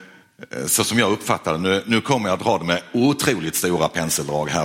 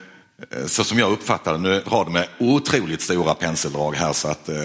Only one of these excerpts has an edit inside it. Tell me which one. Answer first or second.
second